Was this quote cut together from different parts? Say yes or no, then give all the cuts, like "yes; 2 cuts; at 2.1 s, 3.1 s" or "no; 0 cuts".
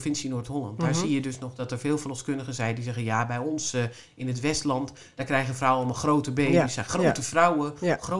no; 0 cuts